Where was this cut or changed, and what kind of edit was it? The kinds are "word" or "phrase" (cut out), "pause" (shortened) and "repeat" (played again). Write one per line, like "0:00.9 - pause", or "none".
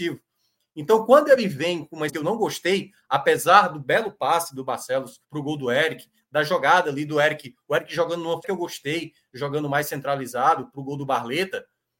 0:02.1 - word
0:05.2 - pause
0:08.4 - phrase